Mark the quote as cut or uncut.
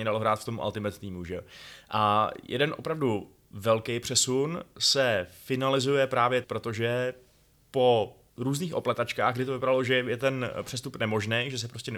cut